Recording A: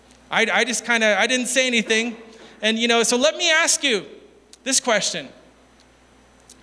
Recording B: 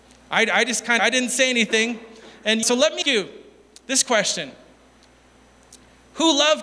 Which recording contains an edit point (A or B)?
B